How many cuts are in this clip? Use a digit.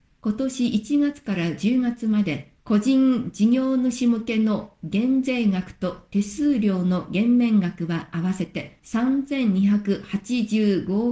2